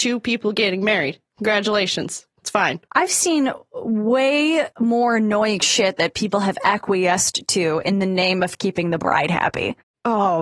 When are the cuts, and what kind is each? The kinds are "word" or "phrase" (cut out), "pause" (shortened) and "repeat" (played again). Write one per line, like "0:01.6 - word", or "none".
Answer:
0:04.7 - pause